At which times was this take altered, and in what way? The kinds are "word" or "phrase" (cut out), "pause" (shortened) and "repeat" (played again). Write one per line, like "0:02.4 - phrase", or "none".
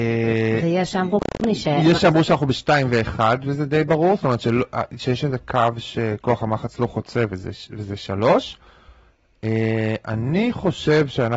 none